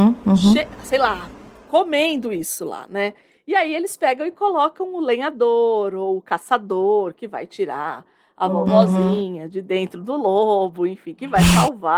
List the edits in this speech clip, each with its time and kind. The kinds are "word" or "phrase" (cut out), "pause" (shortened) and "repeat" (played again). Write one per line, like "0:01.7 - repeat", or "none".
none